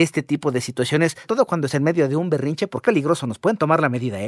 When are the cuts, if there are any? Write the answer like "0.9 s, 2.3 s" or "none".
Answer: 1.2 s, 1.7 s, 2.8 s